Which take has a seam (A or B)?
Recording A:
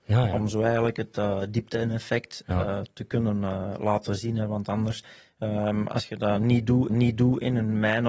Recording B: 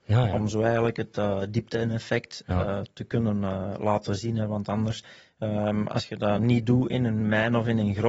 A